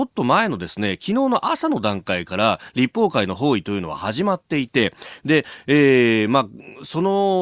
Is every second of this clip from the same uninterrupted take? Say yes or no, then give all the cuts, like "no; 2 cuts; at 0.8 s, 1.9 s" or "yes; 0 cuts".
yes; 0 cuts